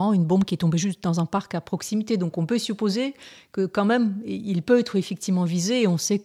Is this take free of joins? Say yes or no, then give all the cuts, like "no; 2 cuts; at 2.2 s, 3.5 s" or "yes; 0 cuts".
yes; 0 cuts